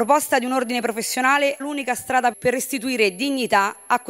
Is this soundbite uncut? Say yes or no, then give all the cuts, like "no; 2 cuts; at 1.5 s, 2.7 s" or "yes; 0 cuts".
no; 2 cuts; at 1.6 s, 2.3 s